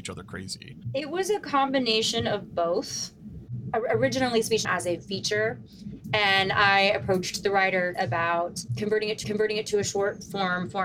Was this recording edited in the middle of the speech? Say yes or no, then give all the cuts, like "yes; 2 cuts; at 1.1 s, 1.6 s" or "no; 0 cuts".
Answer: yes; 3 cuts; at 4.6 s, 7.9 s, 9.2 s